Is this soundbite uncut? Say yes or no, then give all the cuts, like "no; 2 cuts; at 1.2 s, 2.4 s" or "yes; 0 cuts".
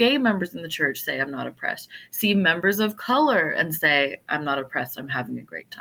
yes; 0 cuts